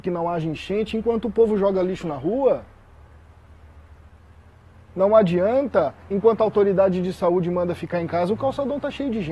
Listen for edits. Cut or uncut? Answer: uncut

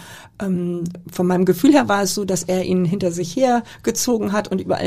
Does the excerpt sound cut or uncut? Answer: uncut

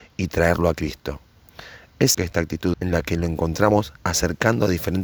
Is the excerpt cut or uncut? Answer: cut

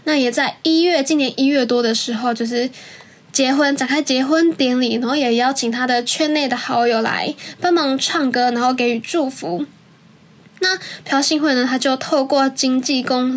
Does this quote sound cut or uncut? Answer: uncut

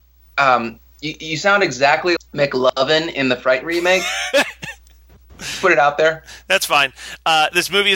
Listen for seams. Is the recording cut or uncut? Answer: cut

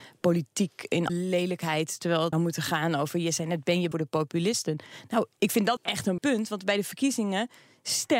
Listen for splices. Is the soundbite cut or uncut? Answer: cut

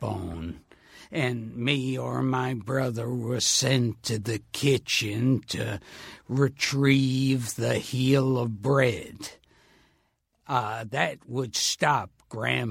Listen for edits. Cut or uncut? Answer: uncut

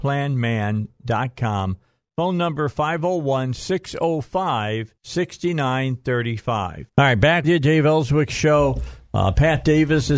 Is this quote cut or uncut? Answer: cut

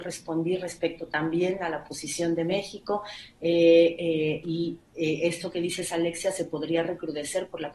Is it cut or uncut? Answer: uncut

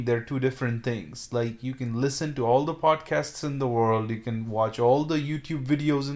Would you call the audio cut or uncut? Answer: uncut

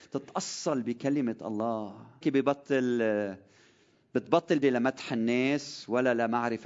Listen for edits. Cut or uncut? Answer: cut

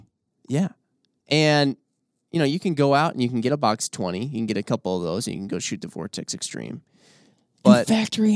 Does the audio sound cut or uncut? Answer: uncut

